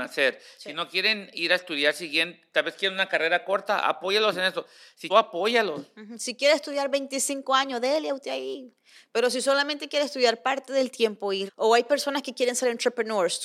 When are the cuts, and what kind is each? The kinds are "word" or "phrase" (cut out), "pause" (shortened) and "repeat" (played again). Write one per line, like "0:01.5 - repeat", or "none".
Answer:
0:05.1 - phrase
0:11.5 - word

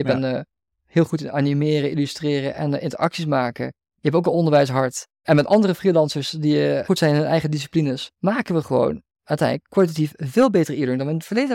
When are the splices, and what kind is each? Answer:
none

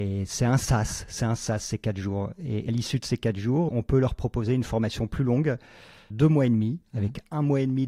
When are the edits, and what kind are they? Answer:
0:02.7 - word
0:03.7 - word
0:06.1 - word

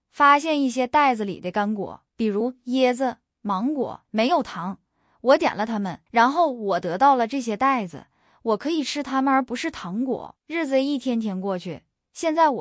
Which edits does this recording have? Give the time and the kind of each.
0:02.1 - pause
0:04.0 - pause
0:06.1 - pause
0:10.4 - pause

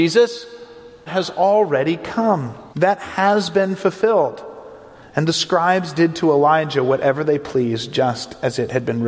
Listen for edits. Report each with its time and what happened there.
0:01.1 - word
0:02.7 - pause

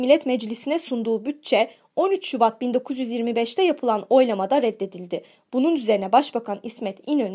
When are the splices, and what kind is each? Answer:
none

